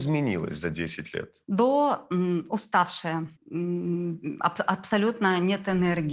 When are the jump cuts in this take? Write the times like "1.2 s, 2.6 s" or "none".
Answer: 3.4 s

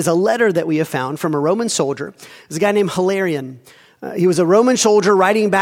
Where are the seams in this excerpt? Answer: none

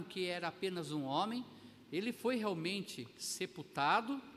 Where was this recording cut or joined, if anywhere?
none

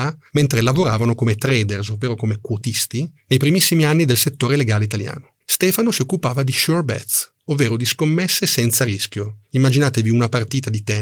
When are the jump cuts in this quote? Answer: 5.4 s

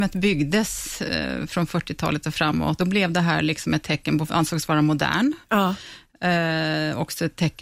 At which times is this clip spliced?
2.8 s, 4.3 s

